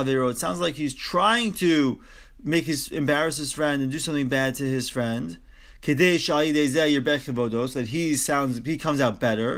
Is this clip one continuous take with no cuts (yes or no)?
yes